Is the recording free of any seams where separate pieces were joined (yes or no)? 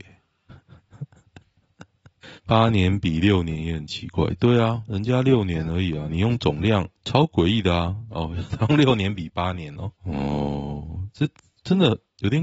no